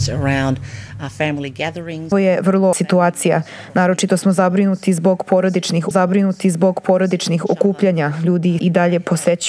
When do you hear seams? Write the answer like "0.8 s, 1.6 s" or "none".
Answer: 2.1 s, 2.7 s, 5.9 s, 8.6 s